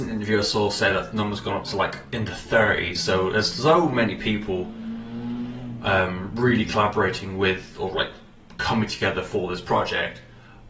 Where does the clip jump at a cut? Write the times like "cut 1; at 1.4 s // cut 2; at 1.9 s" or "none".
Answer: none